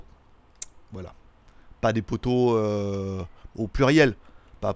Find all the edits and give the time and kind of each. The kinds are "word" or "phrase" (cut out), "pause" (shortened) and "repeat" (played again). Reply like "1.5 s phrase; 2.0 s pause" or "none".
3.5 s word

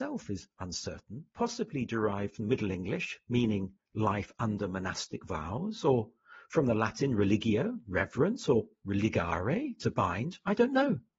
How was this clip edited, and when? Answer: 1.3 s pause

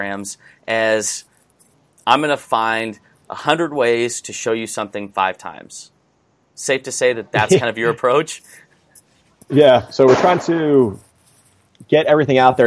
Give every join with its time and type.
none

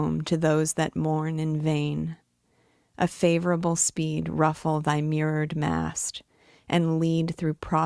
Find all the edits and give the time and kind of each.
none

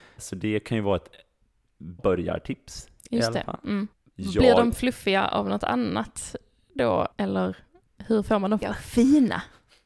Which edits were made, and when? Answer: 2.0 s word; 7.1 s pause; 8.6 s word

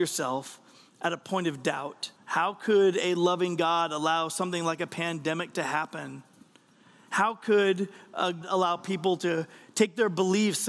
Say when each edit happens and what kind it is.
2.2 s pause; 8.4 s word

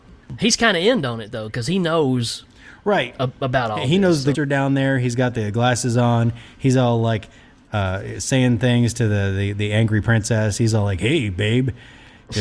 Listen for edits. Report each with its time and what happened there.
4.3 s word

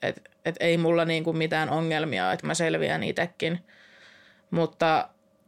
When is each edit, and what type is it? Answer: 2.4 s word

